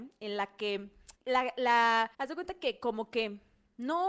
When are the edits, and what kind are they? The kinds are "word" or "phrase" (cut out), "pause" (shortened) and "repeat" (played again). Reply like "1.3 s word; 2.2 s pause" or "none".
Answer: 1.2 s pause; 2.1 s pause